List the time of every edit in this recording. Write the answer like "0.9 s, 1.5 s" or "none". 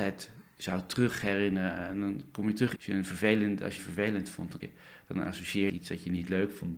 2.8 s, 3.8 s, 4.6 s, 5.7 s